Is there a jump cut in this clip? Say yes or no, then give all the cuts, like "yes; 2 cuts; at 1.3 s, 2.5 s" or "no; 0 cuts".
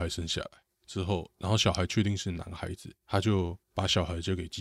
yes; 2 cuts; at 3.0 s, 3.6 s